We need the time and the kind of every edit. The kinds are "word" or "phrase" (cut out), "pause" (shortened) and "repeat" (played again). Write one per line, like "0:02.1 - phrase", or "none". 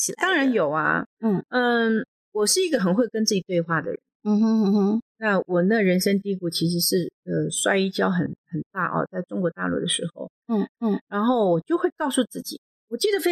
0:10.7 - repeat